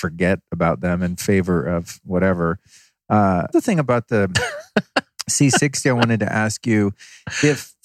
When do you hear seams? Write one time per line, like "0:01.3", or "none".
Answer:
0:03.5